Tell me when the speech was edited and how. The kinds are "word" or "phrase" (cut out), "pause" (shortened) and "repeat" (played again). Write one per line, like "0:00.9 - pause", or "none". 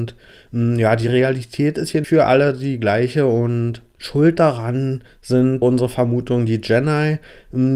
0:02.0 - word
0:05.6 - word